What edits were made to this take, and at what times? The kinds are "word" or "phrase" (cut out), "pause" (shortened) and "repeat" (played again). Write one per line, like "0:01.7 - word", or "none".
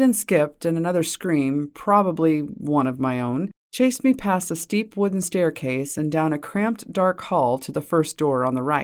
0:03.6 - pause